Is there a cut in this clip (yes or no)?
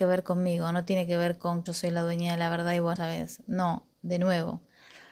yes